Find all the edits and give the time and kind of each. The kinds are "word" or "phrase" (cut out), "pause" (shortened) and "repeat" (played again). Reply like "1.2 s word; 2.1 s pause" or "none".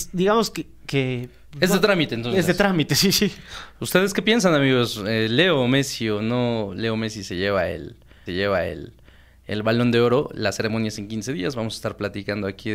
3.7 s pause; 8.3 s repeat